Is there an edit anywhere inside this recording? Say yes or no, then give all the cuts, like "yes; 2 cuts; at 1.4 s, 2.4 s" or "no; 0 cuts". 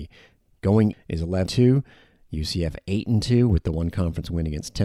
yes; 2 cuts; at 0.9 s, 1.5 s